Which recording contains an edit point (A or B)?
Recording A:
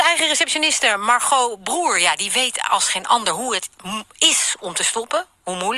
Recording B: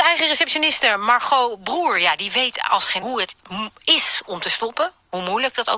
B